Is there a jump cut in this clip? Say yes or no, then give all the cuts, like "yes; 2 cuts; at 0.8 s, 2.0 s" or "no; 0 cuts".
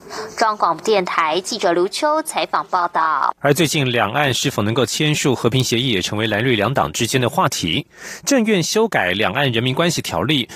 yes; 1 cut; at 3.4 s